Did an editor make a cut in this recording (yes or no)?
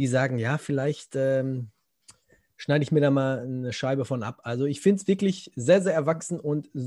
no